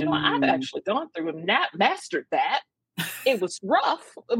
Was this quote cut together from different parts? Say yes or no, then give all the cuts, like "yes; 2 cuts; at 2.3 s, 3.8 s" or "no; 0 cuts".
no; 0 cuts